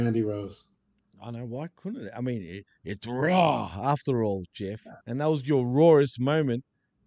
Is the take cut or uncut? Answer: cut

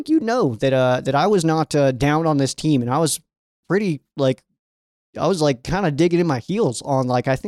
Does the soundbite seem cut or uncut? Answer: uncut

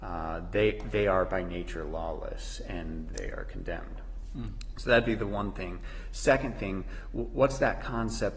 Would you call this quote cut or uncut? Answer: cut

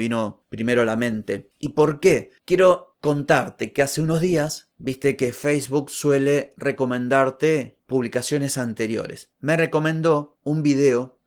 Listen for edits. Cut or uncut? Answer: uncut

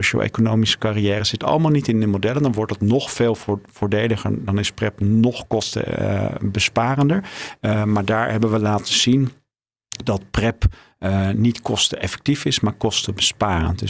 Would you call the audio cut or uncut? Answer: uncut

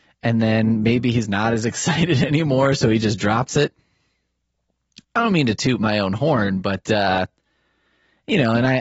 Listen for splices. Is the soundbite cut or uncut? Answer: uncut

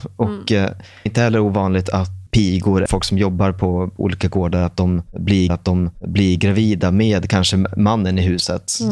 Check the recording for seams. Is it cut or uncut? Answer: cut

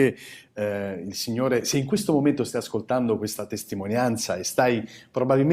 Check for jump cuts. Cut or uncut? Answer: uncut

